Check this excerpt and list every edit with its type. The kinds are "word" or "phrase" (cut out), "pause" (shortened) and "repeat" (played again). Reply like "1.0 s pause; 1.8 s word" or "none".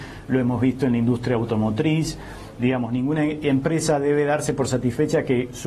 none